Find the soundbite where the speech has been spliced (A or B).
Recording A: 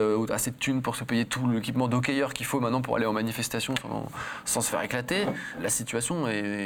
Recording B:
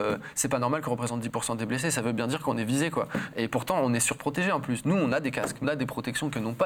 B